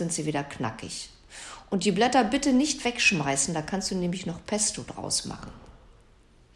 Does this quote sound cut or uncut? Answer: uncut